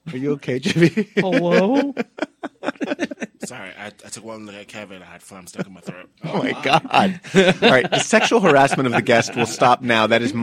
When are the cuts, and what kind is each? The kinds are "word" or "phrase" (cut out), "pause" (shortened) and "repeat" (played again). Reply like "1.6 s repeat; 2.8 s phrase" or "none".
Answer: none